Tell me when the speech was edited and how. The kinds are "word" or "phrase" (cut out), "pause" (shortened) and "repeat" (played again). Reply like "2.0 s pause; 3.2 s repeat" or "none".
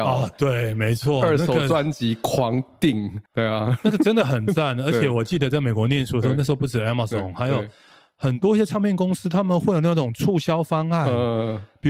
3.3 s pause